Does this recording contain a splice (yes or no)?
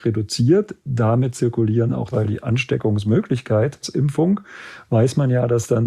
yes